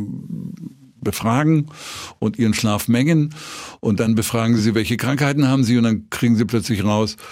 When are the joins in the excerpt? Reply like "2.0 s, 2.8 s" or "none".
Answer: none